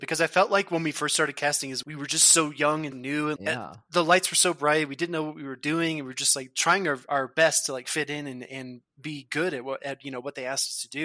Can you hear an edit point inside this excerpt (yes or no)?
yes